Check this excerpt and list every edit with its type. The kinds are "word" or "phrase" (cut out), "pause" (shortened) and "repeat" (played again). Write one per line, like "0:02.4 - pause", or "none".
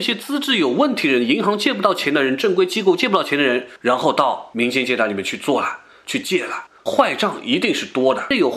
none